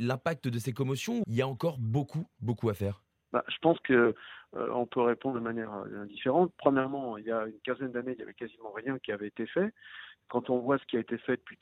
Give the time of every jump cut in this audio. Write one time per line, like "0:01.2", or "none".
0:01.2